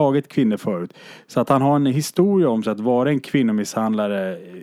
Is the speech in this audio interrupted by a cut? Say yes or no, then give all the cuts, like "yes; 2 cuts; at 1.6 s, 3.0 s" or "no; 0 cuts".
no; 0 cuts